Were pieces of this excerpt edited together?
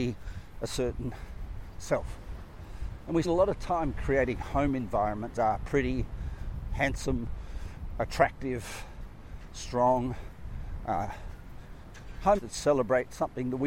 yes; 4 cuts; at 3.2 s, 5.4 s, 6.7 s, 12.4 s

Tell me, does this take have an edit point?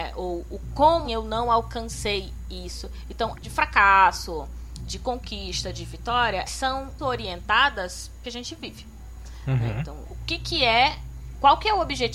yes; 7 cuts; at 1.0 s, 3.3 s, 4.9 s, 6.5 s, 7.0 s, 8.2 s, 10.1 s

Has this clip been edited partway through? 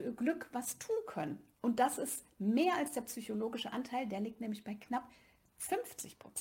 no; 0 cuts

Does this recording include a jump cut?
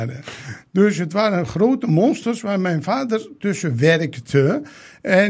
no; 0 cuts

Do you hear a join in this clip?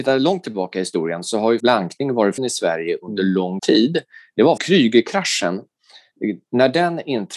yes; 4 cuts; at 1.6 s, 2.4 s, 3.6 s, 4.6 s

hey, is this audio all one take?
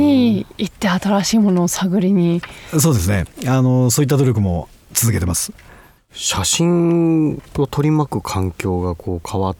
no; 1 cut; at 7.5 s

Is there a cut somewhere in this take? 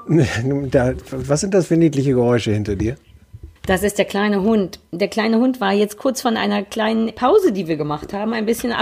yes; 2 cuts; at 3.6 s, 7.1 s

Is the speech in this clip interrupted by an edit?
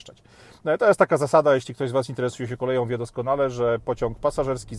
no; 0 cuts

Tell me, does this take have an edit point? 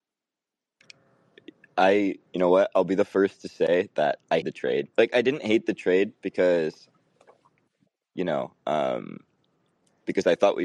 yes; 2 cuts; at 4.4 s, 4.9 s

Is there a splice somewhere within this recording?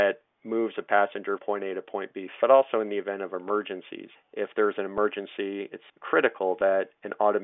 yes; 4 cuts; at 1.4 s, 2.4 s, 4.2 s, 5.9 s

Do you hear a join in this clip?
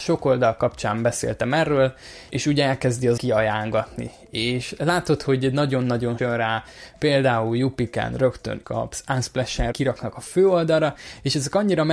yes; 5 cuts; at 2.3 s, 3.2 s, 6.2 s, 8.6 s, 9.7 s

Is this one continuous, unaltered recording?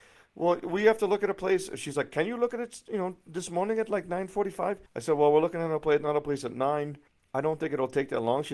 no; 2 cuts; at 4.9 s, 7.1 s

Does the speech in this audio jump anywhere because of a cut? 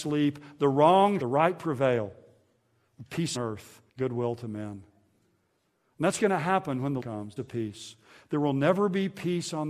yes; 6 cuts; at 1.2 s, 3.3 s, 3.9 s, 6.2 s, 7.0 s, 7.4 s

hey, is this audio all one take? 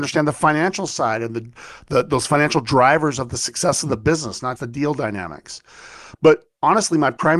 no; 1 cut; at 4.6 s

